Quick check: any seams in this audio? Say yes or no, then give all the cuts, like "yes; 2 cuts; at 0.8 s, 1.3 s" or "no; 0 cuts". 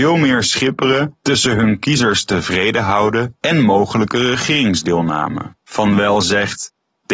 yes; 1 cut; at 5.6 s